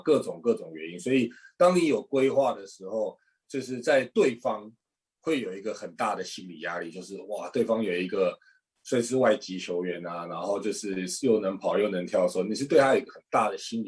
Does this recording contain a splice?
no; 0 cuts

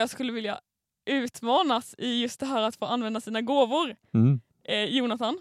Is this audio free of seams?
yes; 0 cuts

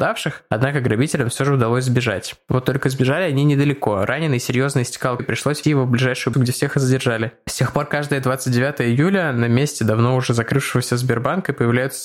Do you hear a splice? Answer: yes; 3 cuts; at 5.2 s, 5.6 s, 6.3 s

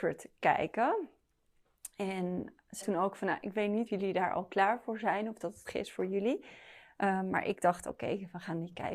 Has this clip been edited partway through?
yes; 3 cuts; at 2.8 s, 3.9 s, 5.6 s

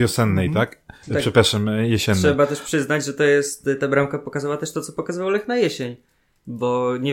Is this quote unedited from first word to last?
yes; 0 cuts

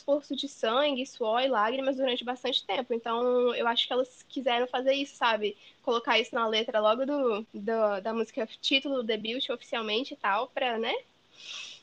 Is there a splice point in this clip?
no; 0 cuts

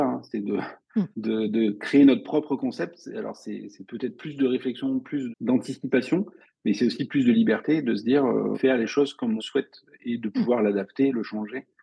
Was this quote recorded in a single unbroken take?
no; 4 cuts; at 1.1 s, 5.3 s, 8.5 s, 9.4 s

